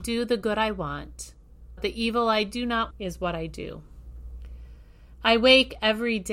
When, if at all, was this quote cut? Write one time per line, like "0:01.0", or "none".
0:01.8
0:02.9